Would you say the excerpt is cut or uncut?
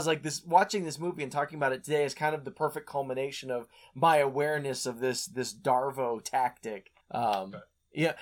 cut